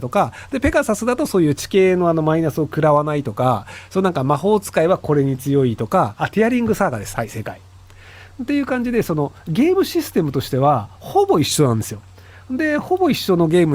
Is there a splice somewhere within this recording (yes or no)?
no